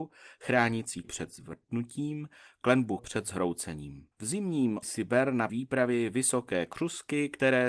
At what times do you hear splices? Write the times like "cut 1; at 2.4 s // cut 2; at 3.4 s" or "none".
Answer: cut 1; at 1.0 s // cut 2; at 3.0 s // cut 3; at 4.1 s // cut 4; at 4.8 s // cut 5; at 5.5 s